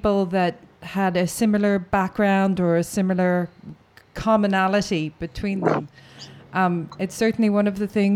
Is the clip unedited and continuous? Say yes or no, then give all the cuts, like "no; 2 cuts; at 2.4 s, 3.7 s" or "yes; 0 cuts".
yes; 0 cuts